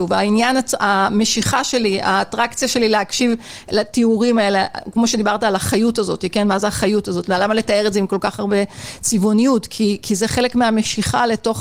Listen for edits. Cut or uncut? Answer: uncut